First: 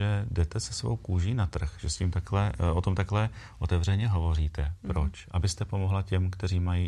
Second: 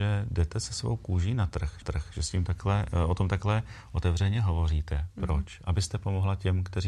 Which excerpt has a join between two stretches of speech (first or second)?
second